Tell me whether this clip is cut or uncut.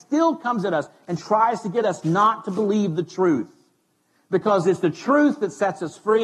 uncut